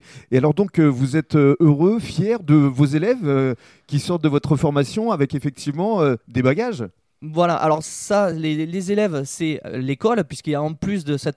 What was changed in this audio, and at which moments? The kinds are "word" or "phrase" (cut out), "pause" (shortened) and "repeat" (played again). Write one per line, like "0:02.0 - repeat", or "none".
none